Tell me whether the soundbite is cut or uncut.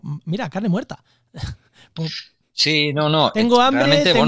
uncut